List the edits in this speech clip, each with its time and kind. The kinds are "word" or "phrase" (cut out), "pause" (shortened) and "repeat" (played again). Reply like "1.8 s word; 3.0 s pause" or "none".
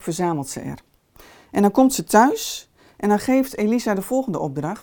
none